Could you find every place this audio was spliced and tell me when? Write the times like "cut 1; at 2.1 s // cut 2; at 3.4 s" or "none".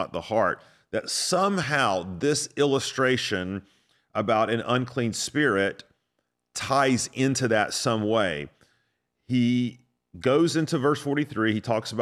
none